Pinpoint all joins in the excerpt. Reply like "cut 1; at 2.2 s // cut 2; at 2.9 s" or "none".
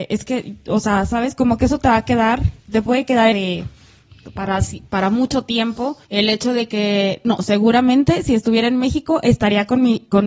cut 1; at 2.6 s // cut 2; at 3.3 s // cut 3; at 6.0 s